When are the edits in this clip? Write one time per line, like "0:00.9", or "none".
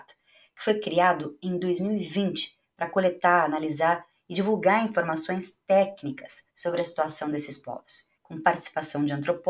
0:06.5
0:08.2